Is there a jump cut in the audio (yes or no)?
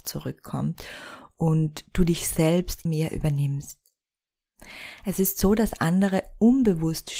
yes